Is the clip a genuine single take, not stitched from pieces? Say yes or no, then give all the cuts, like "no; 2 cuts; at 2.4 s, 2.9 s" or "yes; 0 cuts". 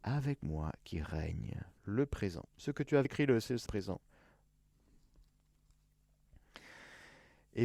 no; 4 cuts; at 1.8 s, 2.5 s, 3.0 s, 3.7 s